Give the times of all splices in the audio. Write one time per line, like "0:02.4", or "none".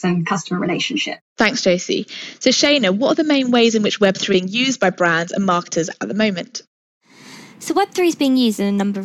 0:01.2
0:04.3